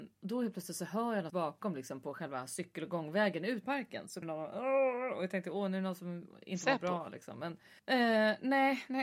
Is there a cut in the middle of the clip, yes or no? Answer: yes